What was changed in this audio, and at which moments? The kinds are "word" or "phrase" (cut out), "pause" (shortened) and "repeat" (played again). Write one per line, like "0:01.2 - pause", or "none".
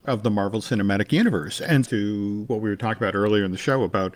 0:01.8 - phrase